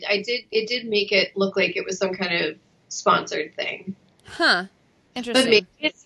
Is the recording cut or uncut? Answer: uncut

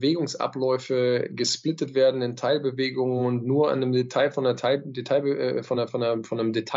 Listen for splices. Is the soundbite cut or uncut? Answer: uncut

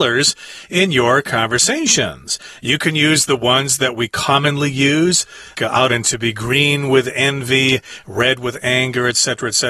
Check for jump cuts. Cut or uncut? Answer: cut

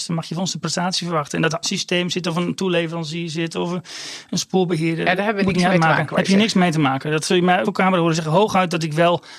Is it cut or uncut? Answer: cut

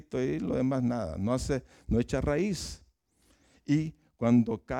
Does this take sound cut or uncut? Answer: uncut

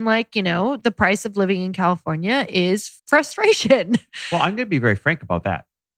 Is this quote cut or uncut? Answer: cut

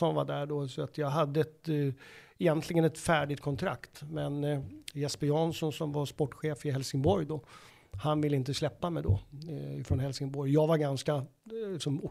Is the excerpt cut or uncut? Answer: uncut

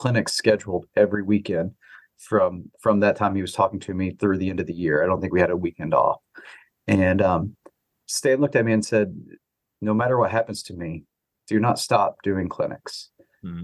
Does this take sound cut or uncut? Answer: uncut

